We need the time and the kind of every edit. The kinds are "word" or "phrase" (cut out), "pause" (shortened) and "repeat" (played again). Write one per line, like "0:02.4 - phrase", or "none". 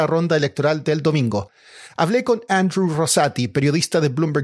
none